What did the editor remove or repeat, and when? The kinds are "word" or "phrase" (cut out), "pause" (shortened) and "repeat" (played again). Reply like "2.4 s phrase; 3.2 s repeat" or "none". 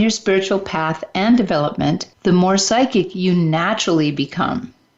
2.1 s pause